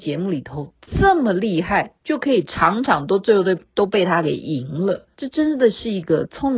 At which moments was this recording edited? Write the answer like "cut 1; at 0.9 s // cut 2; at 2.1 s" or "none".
cut 1; at 2.0 s // cut 2; at 5.1 s